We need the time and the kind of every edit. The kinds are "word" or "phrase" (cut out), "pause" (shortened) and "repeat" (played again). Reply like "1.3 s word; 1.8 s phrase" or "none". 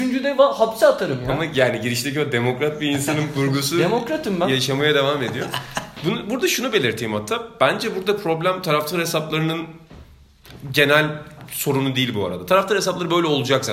none